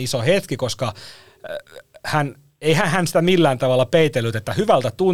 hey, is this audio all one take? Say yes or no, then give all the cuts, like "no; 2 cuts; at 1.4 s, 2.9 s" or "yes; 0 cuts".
yes; 0 cuts